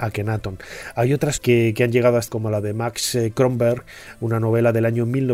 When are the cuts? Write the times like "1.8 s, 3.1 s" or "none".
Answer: 1.4 s, 2.3 s

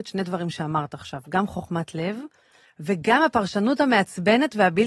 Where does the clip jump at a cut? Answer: none

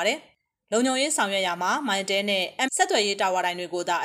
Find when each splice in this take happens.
2.7 s

